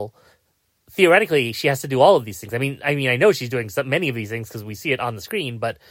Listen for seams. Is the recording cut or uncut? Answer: uncut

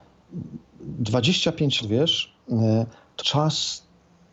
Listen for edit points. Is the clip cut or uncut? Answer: cut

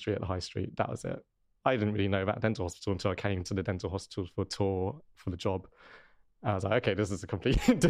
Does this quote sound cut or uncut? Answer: uncut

